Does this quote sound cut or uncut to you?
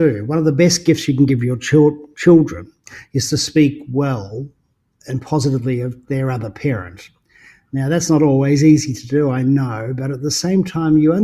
uncut